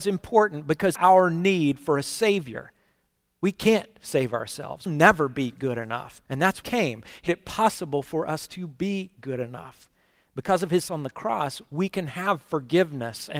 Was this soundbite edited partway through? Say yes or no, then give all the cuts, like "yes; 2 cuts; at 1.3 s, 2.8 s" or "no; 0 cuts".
yes; 6 cuts; at 0.9 s, 4.9 s, 6.3 s, 6.6 s, 7.3 s, 10.9 s